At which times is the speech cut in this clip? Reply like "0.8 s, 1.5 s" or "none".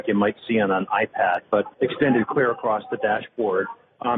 1.7 s